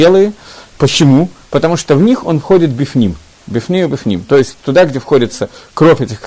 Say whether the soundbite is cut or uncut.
cut